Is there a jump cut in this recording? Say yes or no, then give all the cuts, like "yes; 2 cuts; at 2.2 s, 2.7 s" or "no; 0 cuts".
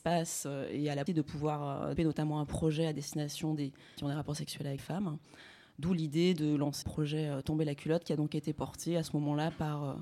yes; 5 cuts; at 1.1 s, 2.0 s, 4.0 s, 4.8 s, 6.8 s